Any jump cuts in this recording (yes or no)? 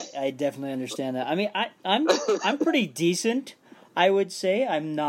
no